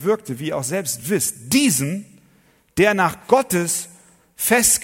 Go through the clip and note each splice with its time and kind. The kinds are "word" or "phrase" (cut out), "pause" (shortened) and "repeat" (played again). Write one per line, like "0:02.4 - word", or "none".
none